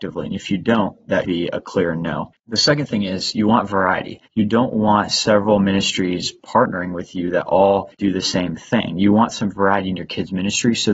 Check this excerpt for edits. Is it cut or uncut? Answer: cut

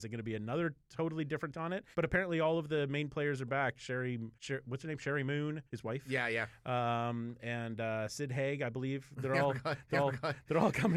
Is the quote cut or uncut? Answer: cut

